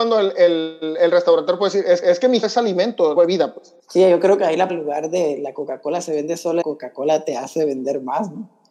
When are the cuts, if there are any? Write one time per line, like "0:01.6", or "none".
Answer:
0:02.0
0:02.4
0:03.2
0:03.8
0:04.7
0:06.6